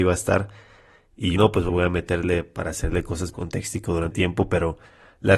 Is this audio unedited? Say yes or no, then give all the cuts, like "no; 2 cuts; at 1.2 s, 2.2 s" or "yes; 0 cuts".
no; 4 cuts; at 1.4 s, 1.7 s, 3.3 s, 4.1 s